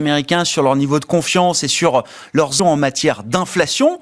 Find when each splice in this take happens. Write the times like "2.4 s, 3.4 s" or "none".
2.6 s